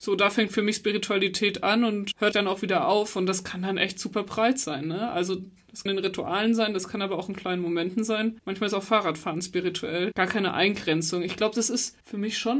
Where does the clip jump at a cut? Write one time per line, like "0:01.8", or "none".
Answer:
0:02.3
0:05.9